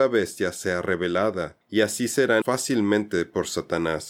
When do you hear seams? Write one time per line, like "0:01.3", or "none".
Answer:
0:02.4